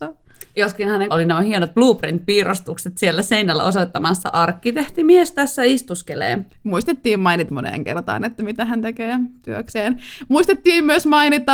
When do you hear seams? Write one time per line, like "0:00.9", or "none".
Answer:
0:01.1
0:04.2
0:07.5